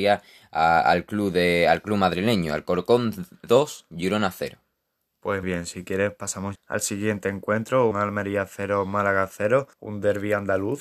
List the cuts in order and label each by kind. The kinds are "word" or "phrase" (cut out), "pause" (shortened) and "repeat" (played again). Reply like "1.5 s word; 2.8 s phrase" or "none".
5.4 s word; 6.5 s word; 7.9 s word; 9.7 s pause